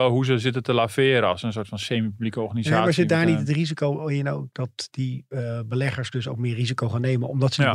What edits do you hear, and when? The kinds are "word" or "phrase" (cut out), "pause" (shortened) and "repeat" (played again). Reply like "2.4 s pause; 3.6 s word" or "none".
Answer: none